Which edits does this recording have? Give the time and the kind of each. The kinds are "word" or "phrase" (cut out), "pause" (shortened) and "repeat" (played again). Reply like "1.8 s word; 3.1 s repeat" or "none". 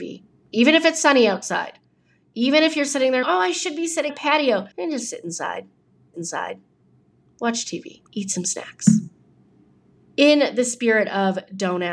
3.2 s word; 4.1 s word; 4.7 s pause; 6.1 s repeat; 8.1 s pause